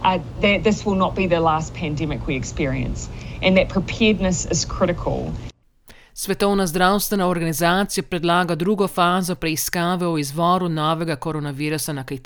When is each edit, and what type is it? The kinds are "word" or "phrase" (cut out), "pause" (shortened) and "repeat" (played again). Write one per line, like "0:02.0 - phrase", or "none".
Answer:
none